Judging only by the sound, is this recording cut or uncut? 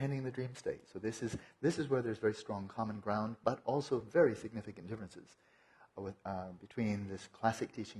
uncut